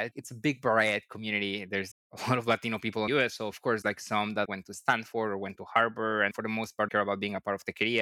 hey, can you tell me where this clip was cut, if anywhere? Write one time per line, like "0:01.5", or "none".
0:01.9
0:03.1
0:03.8
0:04.5
0:06.9